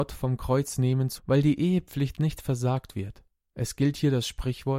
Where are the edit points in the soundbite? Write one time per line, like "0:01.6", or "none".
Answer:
0:01.2